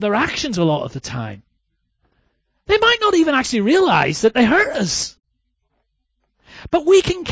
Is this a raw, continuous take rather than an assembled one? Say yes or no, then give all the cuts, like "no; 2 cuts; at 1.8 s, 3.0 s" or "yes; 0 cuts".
yes; 0 cuts